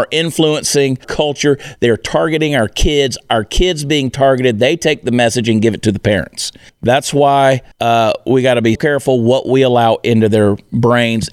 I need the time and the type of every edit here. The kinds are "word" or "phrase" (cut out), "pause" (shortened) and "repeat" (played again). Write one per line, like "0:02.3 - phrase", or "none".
0:01.0 - word
0:06.7 - pause
0:07.7 - pause
0:08.7 - word